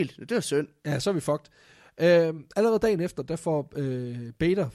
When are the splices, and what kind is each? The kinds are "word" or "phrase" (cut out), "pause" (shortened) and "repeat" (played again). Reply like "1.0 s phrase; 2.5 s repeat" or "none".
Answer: none